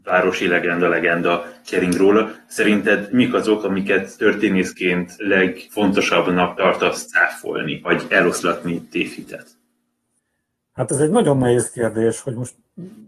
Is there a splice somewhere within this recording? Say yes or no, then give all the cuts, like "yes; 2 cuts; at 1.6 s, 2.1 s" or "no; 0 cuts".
no; 0 cuts